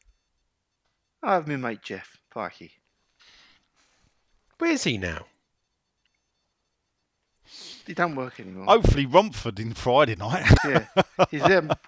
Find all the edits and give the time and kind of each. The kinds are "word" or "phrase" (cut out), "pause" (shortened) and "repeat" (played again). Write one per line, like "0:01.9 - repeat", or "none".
0:02.2 - pause
0:07.8 - pause
0:10.6 - word